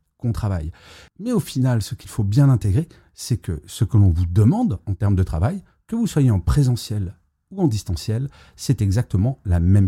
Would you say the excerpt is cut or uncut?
uncut